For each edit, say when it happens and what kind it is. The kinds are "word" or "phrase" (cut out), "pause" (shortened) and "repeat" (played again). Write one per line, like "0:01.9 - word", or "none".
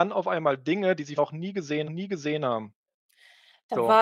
0:01.2 - word
0:01.8 - repeat